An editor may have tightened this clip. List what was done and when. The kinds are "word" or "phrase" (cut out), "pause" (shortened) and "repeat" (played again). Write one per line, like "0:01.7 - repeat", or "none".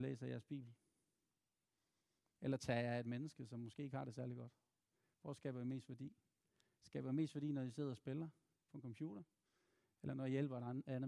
none